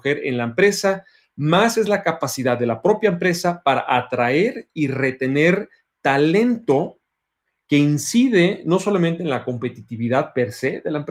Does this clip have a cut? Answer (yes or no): no